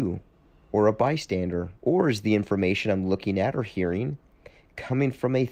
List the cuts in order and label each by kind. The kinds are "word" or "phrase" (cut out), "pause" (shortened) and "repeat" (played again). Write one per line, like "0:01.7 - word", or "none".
0:01.8 - pause